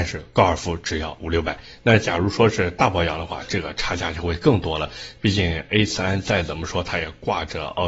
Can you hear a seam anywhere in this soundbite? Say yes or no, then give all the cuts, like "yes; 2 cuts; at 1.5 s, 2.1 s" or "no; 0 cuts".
no; 0 cuts